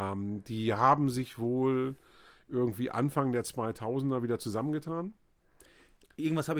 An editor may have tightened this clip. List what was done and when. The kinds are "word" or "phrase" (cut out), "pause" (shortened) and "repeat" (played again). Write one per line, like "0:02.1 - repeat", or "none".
none